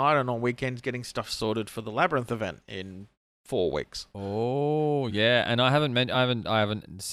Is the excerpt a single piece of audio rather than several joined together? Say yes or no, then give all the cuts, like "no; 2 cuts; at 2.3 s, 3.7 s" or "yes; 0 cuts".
yes; 0 cuts